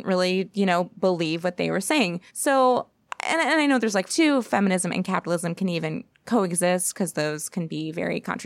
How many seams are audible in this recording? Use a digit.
2